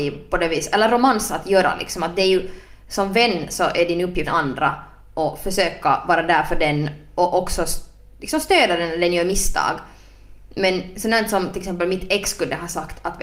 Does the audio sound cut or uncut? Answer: cut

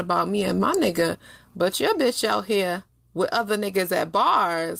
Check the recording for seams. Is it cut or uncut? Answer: uncut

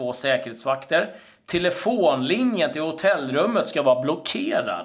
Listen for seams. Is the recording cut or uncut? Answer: uncut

